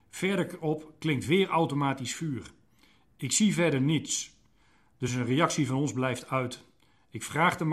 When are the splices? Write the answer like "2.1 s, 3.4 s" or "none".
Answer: none